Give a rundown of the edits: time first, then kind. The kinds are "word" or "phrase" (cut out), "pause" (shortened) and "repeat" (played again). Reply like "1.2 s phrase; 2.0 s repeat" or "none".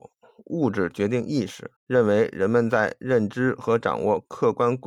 1.8 s pause